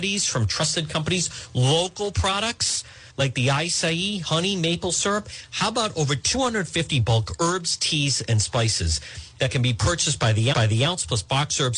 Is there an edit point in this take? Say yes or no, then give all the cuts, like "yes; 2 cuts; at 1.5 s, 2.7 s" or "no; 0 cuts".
yes; 2 cuts; at 3.1 s, 10.5 s